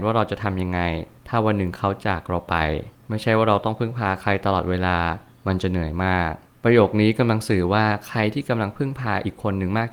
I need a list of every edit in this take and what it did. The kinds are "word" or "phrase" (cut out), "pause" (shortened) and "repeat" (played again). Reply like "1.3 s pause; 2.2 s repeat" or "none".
none

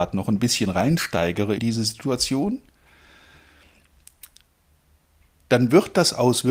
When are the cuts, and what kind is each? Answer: 1.6 s word

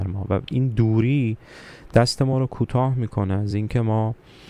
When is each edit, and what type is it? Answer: none

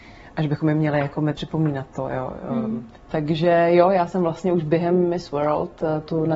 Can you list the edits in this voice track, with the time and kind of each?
1.3 s phrase; 3.0 s pause

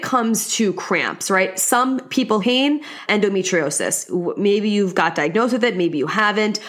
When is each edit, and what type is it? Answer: 2.4 s phrase; 3.1 s word

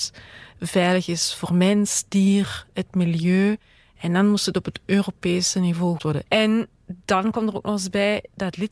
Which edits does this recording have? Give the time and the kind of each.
6.0 s word

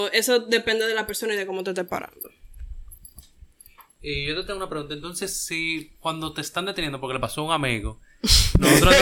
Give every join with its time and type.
none

